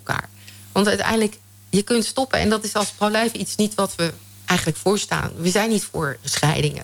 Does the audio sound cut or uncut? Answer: uncut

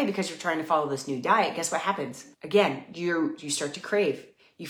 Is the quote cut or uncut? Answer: cut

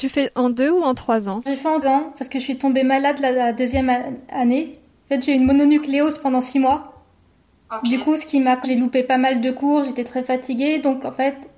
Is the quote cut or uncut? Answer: cut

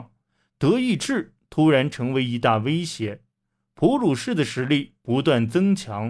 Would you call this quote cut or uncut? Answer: uncut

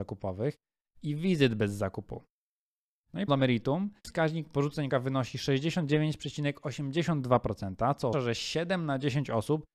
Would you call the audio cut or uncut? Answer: cut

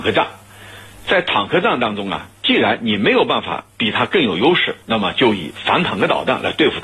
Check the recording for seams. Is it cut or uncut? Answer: cut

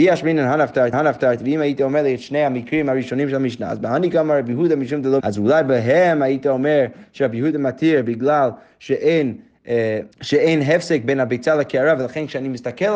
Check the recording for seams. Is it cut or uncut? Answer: cut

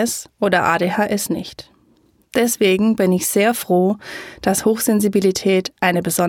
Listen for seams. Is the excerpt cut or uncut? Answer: uncut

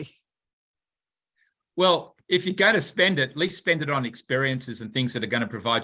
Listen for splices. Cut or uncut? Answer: uncut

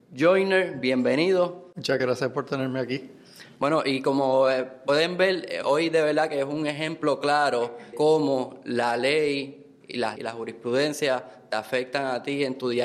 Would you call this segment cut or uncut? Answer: cut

